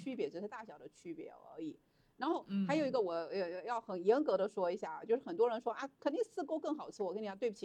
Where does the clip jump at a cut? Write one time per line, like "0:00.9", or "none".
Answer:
none